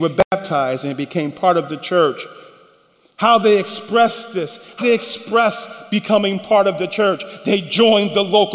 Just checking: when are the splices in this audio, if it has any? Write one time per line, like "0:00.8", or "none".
0:04.8